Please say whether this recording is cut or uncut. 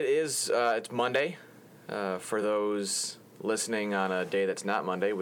uncut